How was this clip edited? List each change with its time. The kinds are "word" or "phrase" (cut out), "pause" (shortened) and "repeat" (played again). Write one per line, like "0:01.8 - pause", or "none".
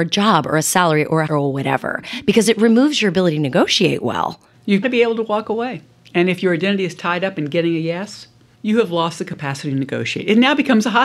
0:01.3 - word
0:04.8 - word